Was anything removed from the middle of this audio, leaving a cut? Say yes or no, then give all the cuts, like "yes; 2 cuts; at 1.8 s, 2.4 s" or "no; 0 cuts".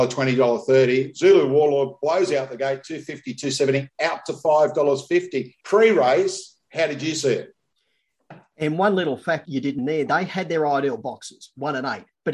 yes; 3 cuts; at 5.6 s, 9.5 s, 9.8 s